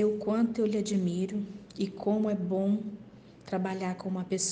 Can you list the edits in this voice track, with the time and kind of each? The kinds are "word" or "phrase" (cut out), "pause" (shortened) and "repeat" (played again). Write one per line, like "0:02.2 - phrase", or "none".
none